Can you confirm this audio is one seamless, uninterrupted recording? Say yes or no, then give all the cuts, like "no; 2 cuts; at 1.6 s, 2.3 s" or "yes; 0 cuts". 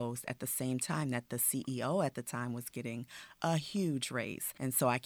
yes; 0 cuts